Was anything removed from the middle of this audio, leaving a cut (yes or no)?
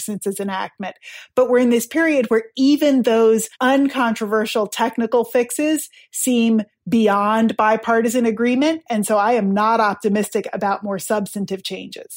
yes